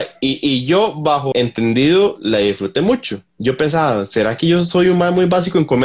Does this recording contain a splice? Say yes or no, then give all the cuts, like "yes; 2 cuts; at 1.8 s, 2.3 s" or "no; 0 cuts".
yes; 2 cuts; at 1.3 s, 3.3 s